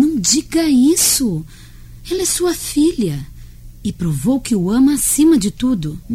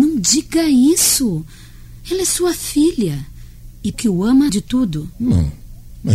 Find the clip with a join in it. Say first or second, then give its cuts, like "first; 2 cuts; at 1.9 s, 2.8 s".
second; 2 cuts; at 3.9 s, 4.5 s